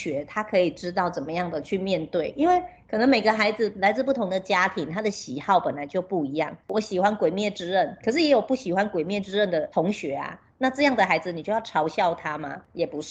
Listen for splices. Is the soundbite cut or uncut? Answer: cut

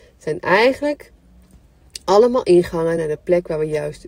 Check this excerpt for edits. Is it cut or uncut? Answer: uncut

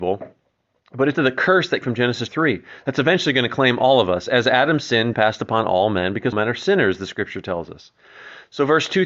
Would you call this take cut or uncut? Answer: cut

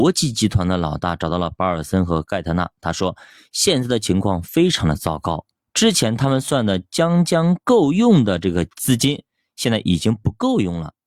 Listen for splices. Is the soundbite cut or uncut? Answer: uncut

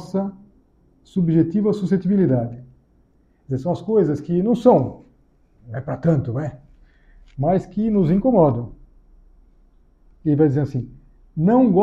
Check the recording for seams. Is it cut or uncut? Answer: uncut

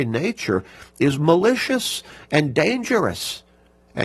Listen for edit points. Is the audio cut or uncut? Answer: uncut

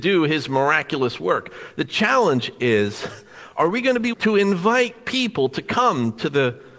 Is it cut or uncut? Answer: cut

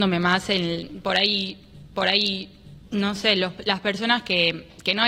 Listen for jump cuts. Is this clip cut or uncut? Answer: cut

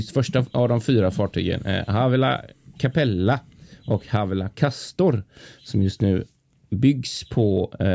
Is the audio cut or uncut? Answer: uncut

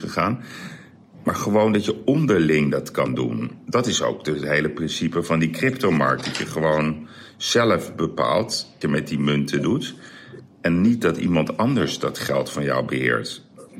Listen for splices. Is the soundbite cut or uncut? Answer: cut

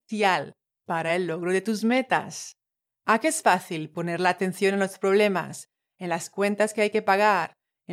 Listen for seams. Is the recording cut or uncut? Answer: uncut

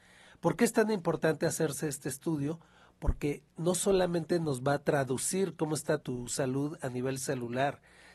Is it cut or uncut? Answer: cut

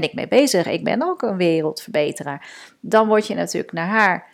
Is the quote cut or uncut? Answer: uncut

